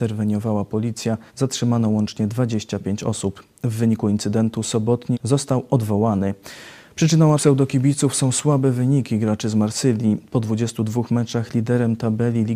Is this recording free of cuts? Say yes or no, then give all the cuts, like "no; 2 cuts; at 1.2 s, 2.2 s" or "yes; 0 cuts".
no; 3 cuts; at 1.3 s, 5.1 s, 7.4 s